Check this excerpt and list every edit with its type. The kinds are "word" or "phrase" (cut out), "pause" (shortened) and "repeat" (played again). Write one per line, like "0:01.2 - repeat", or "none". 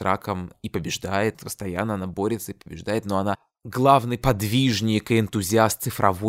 none